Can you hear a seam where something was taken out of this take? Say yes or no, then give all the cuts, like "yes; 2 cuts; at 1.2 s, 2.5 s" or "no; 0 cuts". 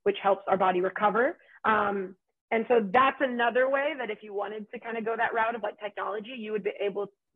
no; 0 cuts